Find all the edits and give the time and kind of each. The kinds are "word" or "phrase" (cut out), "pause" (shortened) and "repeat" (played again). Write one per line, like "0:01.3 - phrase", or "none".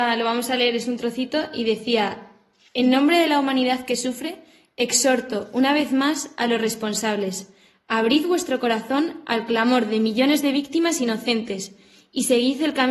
none